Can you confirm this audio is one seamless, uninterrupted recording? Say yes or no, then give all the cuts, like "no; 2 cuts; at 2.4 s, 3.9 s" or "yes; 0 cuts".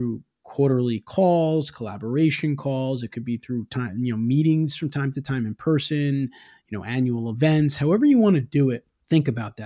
yes; 0 cuts